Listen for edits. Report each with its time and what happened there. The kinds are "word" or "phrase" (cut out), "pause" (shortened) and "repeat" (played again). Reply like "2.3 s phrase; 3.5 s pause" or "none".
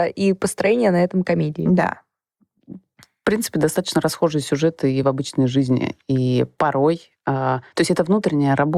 none